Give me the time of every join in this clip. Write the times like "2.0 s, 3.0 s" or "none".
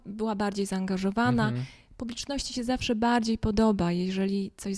none